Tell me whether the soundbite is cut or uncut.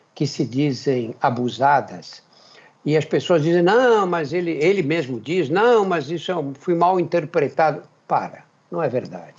uncut